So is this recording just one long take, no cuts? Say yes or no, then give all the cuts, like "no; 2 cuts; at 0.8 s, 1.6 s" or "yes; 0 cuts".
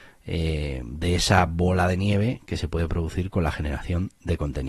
yes; 0 cuts